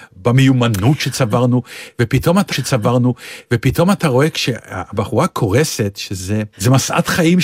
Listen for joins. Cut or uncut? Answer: cut